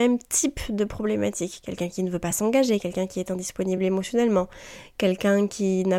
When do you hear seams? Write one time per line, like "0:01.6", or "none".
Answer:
none